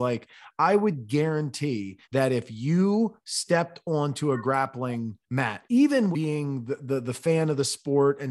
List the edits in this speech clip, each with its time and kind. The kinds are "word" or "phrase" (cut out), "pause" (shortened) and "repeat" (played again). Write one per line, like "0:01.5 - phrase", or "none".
0:02.0 - pause
0:05.2 - pause
0:06.1 - word